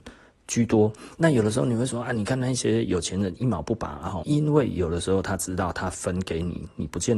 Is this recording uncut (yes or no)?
no